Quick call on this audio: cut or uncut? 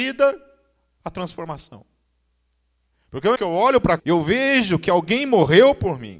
cut